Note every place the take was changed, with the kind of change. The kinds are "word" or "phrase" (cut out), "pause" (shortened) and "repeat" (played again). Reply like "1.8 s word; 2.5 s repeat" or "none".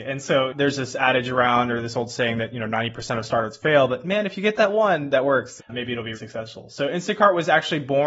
5.6 s word; 6.1 s word